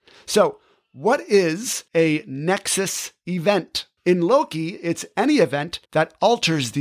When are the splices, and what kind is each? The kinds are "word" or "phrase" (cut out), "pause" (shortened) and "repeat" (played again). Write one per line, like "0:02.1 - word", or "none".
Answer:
0:01.9 - pause
0:04.0 - pause
0:05.9 - pause